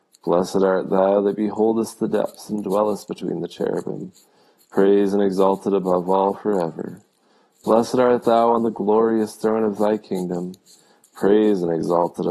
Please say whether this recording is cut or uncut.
uncut